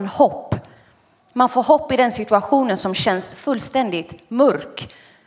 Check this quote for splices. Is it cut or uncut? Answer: uncut